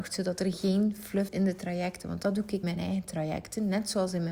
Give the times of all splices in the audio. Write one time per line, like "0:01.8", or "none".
0:01.3
0:02.6